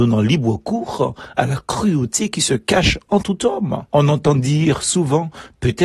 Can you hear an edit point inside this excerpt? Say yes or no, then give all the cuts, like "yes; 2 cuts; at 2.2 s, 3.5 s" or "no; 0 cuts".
yes; 1 cut; at 3.9 s